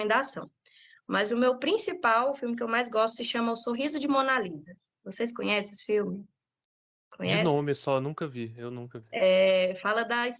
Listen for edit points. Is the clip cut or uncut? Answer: uncut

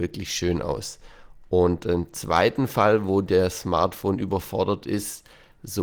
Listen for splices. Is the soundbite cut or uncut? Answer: uncut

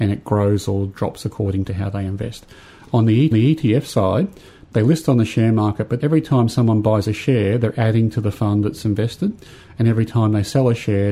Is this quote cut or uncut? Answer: cut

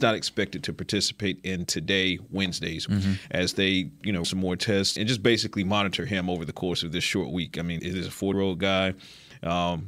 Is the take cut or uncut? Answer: cut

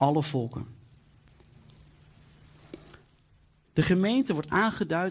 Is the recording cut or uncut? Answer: uncut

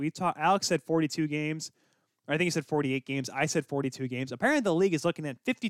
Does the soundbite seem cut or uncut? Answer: uncut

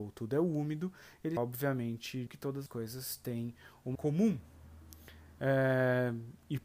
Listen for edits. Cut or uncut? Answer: cut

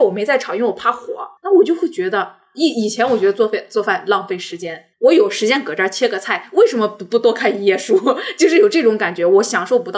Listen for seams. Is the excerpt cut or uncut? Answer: cut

